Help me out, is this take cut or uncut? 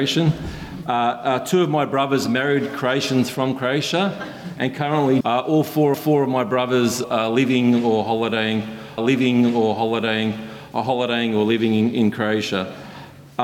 cut